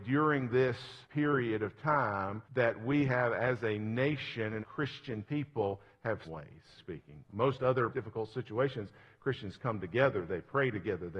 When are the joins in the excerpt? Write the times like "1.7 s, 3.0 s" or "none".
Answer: 1.0 s, 2.5 s, 4.6 s, 6.2 s, 6.8 s, 7.9 s